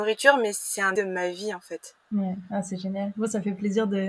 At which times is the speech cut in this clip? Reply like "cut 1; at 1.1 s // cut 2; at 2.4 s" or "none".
cut 1; at 1.0 s

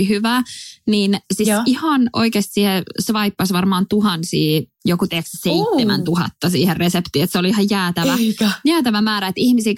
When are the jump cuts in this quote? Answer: none

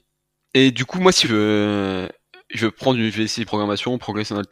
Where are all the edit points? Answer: cut 1; at 1.2 s // cut 2; at 3.5 s

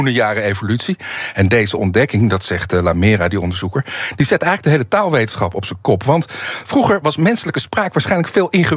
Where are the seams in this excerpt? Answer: none

